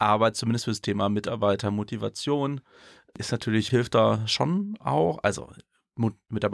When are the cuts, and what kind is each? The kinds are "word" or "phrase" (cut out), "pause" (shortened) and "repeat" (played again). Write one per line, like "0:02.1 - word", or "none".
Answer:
0:03.7 - phrase

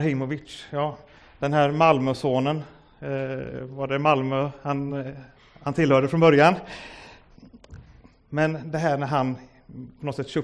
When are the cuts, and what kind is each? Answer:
none

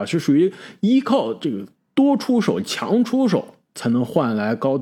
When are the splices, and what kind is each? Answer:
none

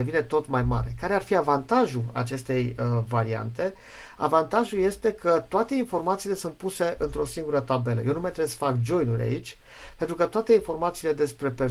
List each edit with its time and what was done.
none

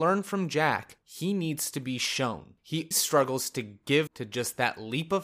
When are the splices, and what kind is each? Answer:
0:02.9 - word
0:04.1 - word

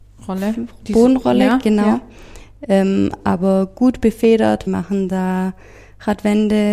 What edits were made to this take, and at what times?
0:04.7 - phrase

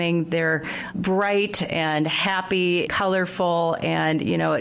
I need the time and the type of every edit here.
0:00.9 - word
0:02.9 - word

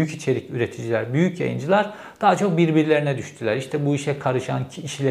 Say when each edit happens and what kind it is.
none

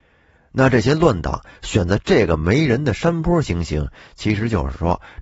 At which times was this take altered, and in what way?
none

